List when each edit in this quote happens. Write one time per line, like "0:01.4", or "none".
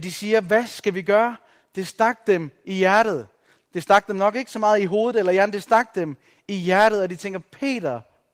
none

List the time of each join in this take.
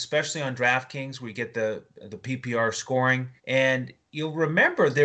0:03.4

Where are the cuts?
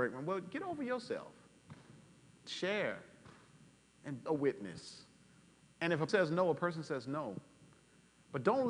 0:02.4
0:04.3
0:06.1

